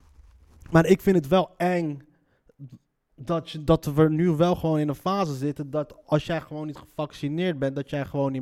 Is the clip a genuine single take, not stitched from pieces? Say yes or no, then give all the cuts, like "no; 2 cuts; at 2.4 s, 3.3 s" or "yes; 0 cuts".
yes; 0 cuts